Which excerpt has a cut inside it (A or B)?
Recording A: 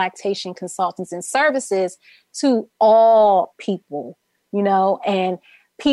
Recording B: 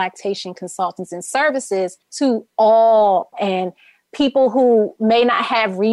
B